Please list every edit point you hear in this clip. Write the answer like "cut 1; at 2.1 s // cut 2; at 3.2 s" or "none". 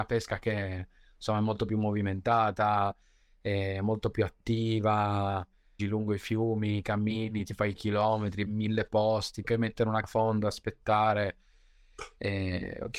cut 1; at 5.8 s // cut 2; at 7.7 s // cut 3; at 8.5 s // cut 4; at 9.4 s // cut 5; at 10.0 s